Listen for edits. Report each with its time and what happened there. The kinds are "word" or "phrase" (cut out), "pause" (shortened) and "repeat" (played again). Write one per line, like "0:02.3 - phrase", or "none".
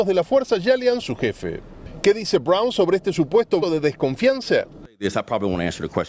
0:01.0 - phrase
0:03.6 - word